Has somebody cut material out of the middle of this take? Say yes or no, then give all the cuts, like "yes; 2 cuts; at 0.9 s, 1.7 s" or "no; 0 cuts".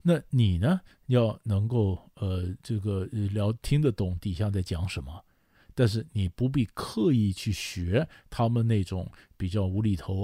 no; 0 cuts